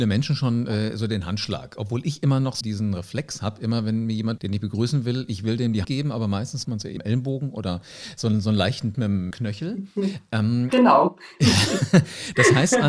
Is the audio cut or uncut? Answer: cut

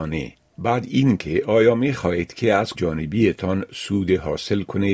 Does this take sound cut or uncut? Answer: cut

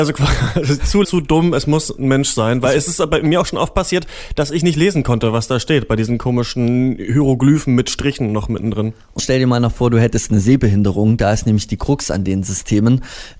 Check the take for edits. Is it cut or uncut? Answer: cut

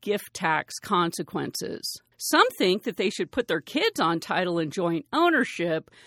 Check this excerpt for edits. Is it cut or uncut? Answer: cut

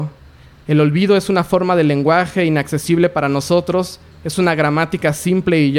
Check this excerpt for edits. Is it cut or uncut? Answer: uncut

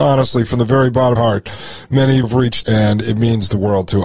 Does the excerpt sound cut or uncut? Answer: cut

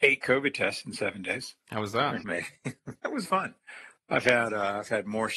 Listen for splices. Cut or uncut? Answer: cut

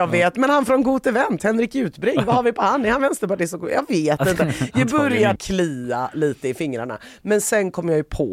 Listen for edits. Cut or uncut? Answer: cut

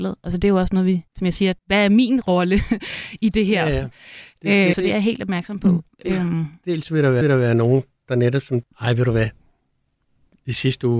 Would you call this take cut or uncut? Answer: cut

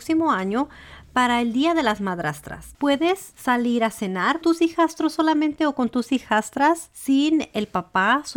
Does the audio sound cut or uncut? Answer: cut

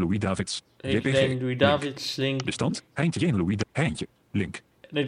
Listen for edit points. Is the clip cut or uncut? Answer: uncut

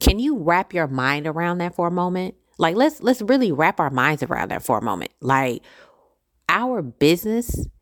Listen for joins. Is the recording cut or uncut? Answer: uncut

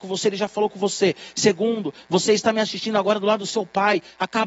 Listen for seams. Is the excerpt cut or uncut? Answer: uncut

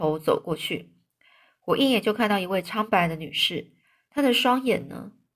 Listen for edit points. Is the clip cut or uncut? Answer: uncut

